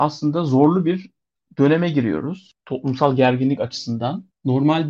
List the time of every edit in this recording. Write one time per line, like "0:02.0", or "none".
none